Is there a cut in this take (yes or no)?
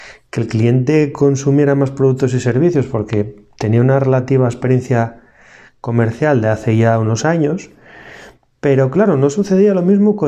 no